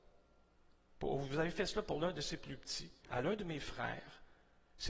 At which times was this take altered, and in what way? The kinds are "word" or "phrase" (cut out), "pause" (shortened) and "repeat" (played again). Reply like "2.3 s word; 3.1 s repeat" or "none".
3.0 s pause